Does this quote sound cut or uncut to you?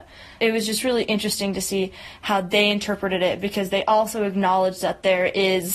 uncut